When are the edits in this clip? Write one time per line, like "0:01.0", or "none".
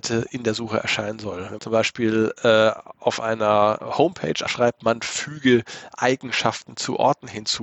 0:01.6
0:04.5